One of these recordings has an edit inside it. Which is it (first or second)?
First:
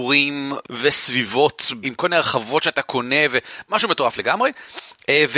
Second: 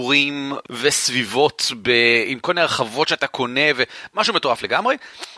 first